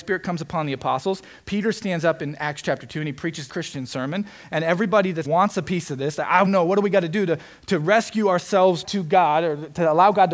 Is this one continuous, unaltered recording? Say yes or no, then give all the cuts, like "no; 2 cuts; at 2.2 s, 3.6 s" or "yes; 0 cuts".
no; 4 cuts; at 3.5 s, 5.2 s, 6.5 s, 8.8 s